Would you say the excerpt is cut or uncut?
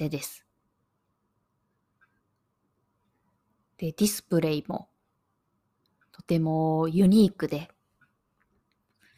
uncut